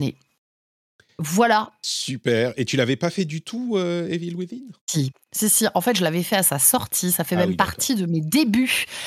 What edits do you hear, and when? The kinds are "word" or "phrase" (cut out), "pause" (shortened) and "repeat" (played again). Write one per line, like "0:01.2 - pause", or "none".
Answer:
0:04.8 - pause